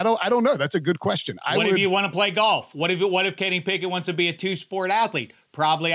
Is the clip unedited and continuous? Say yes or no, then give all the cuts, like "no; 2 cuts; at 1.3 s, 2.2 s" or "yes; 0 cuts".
yes; 0 cuts